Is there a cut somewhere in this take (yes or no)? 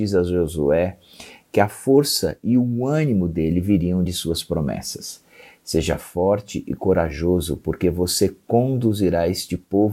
no